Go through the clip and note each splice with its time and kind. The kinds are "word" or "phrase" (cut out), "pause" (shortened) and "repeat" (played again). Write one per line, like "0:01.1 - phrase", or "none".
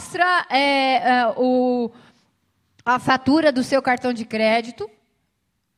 none